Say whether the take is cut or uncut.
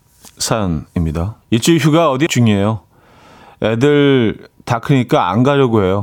cut